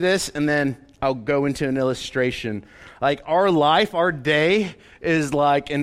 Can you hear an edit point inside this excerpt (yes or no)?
no